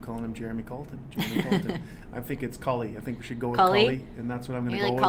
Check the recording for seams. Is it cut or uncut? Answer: uncut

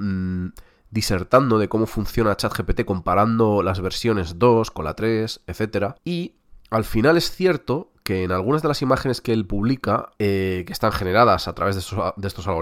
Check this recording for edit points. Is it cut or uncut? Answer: cut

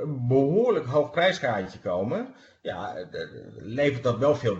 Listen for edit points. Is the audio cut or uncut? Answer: cut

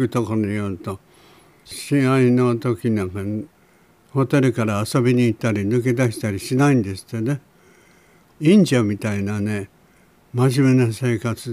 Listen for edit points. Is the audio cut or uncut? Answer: uncut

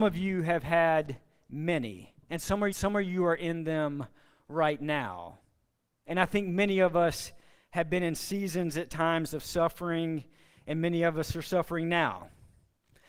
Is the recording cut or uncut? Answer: cut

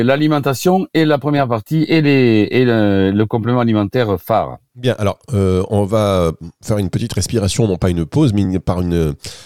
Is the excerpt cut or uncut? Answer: uncut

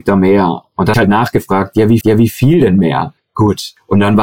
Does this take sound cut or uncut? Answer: cut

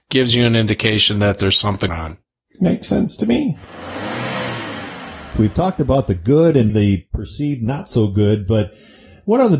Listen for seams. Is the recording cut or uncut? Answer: cut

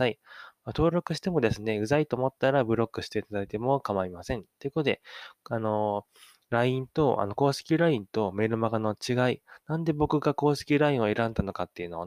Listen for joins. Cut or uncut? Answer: uncut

